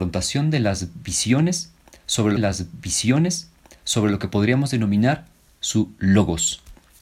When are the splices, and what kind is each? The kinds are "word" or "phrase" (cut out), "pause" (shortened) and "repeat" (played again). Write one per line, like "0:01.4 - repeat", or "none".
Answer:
0:02.4 - repeat